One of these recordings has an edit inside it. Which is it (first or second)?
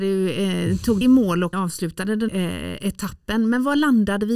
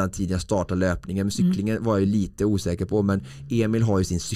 first